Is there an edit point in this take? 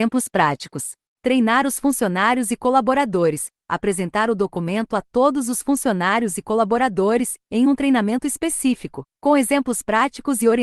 no; 0 cuts

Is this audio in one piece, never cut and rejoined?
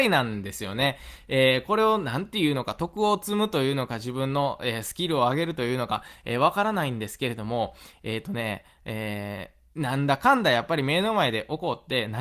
yes; 0 cuts

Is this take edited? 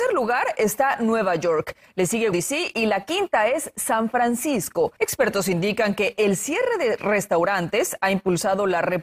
yes; 2 cuts; at 2.3 s, 5.0 s

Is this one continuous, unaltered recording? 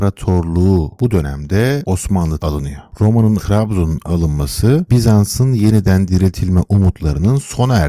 no; 2 cuts; at 2.4 s, 3.4 s

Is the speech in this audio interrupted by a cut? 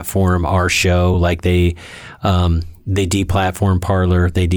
no; 0 cuts

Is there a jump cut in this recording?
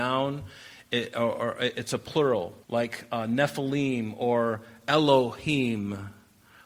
yes; 1 cut; at 2.6 s

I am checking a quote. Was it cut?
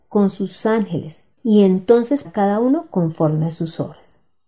yes; 2 cuts; at 1.3 s, 2.2 s

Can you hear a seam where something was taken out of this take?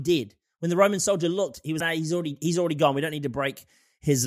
yes; 1 cut; at 1.8 s

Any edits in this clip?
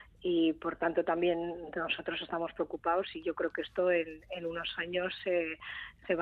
no; 0 cuts

